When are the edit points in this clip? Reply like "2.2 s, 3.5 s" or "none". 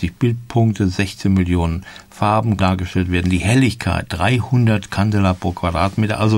2.6 s